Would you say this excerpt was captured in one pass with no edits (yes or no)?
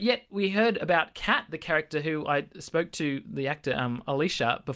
yes